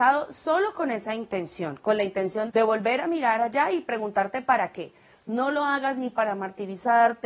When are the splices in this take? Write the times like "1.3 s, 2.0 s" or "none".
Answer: 2.5 s